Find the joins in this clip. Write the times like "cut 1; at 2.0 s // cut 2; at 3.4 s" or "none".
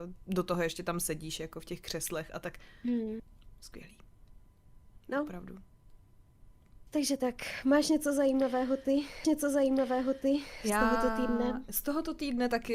cut 1; at 9.2 s